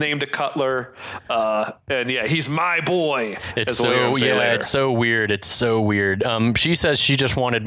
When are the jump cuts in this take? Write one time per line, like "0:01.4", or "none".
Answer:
none